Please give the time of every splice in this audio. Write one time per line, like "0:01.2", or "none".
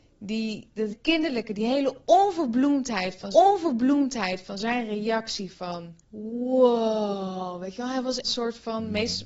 0:00.9
0:03.3
0:06.0
0:08.2